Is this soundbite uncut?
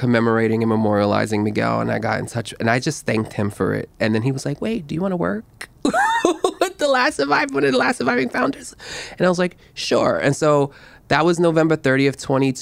yes; 0 cuts

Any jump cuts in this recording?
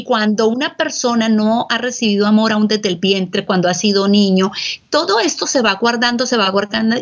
no; 0 cuts

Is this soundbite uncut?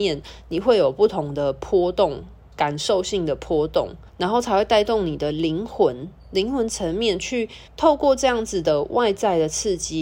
no; 2 cuts; at 4.1 s, 7.7 s

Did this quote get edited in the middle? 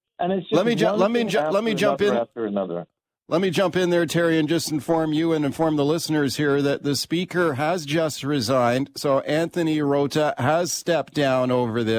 no; 0 cuts

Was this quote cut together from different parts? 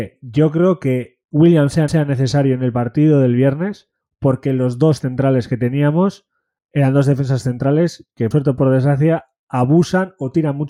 yes; 6 cuts; at 1.2 s, 1.9 s, 4.0 s, 5.0 s, 6.6 s, 8.3 s

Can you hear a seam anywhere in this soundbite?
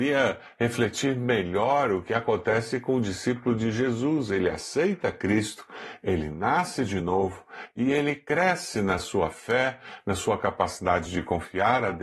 no; 0 cuts

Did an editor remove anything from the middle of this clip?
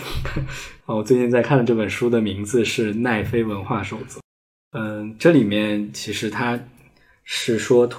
no; 0 cuts

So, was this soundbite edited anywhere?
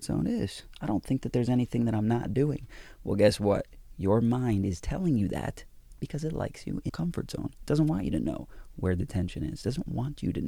yes; 1 cut; at 6.9 s

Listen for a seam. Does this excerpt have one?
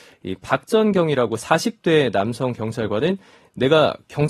no; 0 cuts

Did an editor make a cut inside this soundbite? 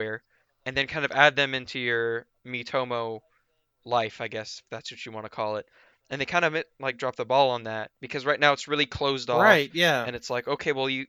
no; 0 cuts

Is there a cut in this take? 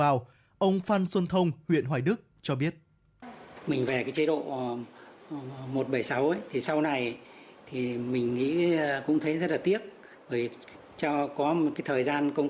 no; 0 cuts

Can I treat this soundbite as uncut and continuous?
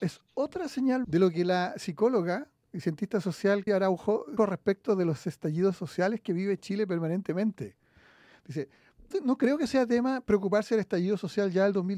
no; 4 cuts; at 1.0 s, 3.7 s, 4.4 s, 9.1 s

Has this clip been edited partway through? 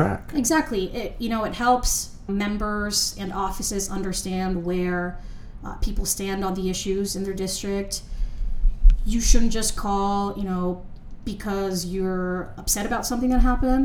yes; 1 cut; at 2.3 s

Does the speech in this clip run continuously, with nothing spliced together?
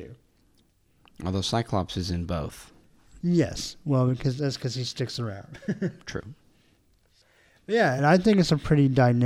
yes; 0 cuts

